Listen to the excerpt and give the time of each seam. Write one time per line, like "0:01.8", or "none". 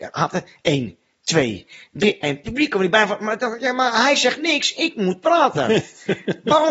none